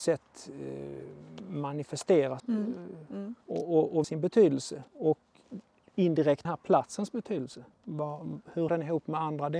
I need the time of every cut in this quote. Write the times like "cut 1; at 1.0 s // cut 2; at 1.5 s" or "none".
cut 1; at 2.4 s // cut 2; at 3.4 s // cut 3; at 4.0 s // cut 4; at 4.9 s // cut 5; at 6.4 s // cut 6; at 7.7 s // cut 7; at 8.7 s